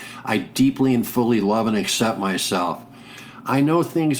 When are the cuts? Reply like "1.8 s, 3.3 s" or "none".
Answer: none